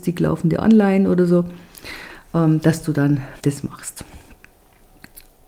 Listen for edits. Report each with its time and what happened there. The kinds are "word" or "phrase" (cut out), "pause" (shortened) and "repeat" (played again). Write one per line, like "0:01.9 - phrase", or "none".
0:03.4 - pause